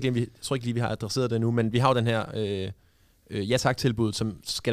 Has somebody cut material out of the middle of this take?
no; 0 cuts

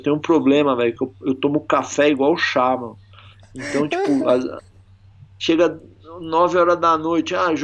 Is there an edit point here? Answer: no; 0 cuts

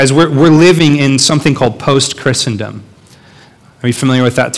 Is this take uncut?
yes; 0 cuts

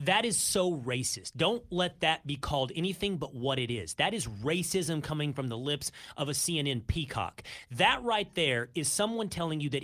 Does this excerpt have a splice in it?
no; 0 cuts

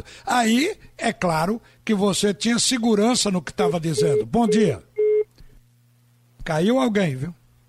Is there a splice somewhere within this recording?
no; 0 cuts

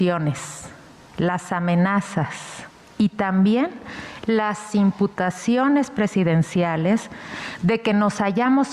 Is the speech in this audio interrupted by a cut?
no; 0 cuts

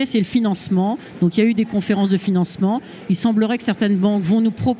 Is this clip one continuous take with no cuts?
yes; 0 cuts

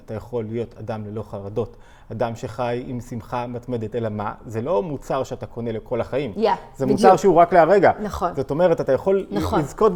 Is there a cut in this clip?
no; 0 cuts

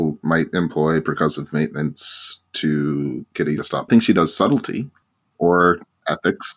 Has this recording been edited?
yes; 2 cuts; at 3.6 s, 3.9 s

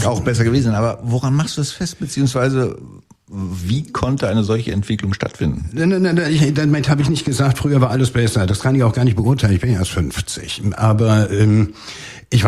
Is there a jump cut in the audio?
no; 0 cuts

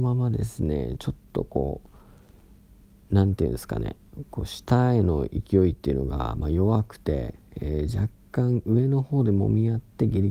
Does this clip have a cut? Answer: no; 0 cuts

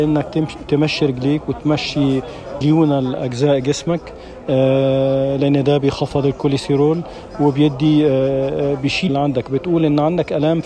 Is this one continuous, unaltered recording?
no; 2 cuts; at 2.6 s, 9.1 s

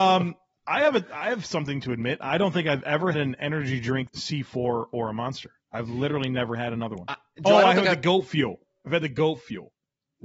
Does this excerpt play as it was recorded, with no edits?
no; 2 cuts; at 3.1 s, 4.1 s

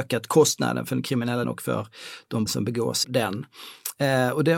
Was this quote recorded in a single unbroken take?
no; 3 cuts; at 1.4 s, 2.5 s, 3.0 s

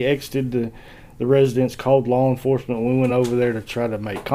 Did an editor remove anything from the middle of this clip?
no; 0 cuts

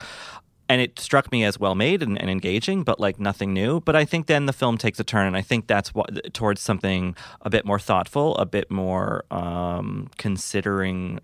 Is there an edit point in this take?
no; 0 cuts

